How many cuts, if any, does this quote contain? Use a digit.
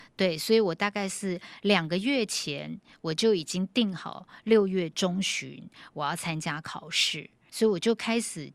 1